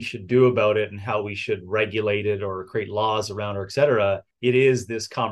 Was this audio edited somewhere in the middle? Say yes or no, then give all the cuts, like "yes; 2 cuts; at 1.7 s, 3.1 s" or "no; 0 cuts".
yes; 1 cut; at 4.3 s